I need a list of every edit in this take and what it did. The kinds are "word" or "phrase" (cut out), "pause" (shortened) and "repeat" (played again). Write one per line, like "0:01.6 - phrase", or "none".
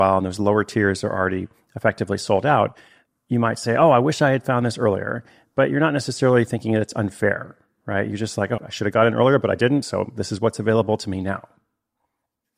0:08.6 - word